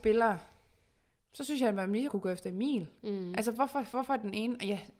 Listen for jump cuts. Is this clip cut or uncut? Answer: cut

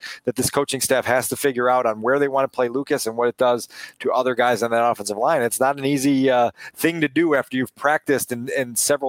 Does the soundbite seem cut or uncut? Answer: uncut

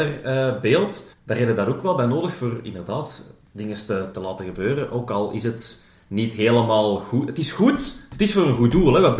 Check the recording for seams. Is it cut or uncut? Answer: cut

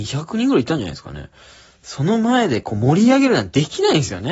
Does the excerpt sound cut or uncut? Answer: uncut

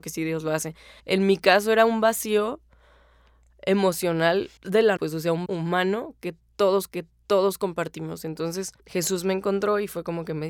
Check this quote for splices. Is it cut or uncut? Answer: cut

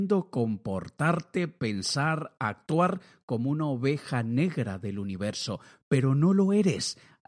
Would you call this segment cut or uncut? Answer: uncut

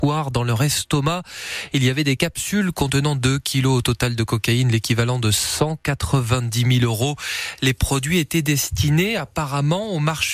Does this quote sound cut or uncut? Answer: uncut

